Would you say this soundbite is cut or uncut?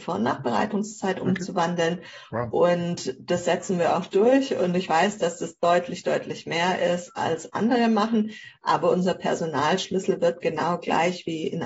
uncut